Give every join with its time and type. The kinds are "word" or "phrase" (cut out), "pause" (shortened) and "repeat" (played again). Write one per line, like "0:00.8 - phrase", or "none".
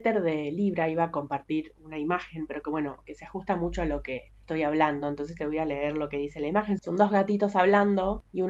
none